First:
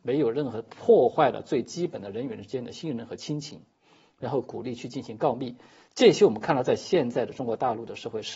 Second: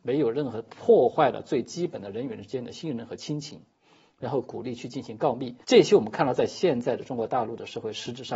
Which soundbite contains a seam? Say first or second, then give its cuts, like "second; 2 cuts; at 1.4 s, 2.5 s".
second; 1 cut; at 5.6 s